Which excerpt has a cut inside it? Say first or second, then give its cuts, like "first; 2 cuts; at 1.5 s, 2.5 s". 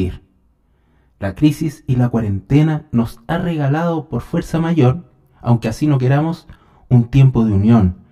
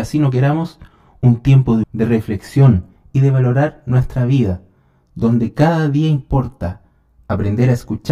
second; 1 cut; at 1.8 s